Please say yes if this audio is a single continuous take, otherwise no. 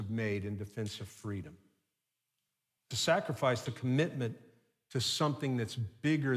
no